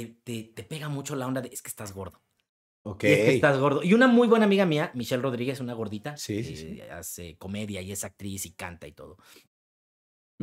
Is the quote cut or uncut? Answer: uncut